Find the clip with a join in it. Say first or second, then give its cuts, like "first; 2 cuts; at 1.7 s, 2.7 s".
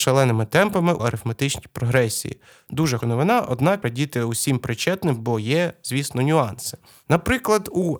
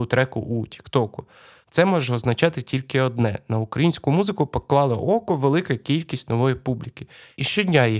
first; 3 cuts; at 1.0 s, 3.0 s, 3.8 s